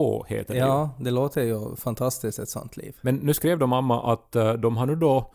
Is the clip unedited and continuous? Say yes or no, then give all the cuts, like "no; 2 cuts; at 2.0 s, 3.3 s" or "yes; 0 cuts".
yes; 0 cuts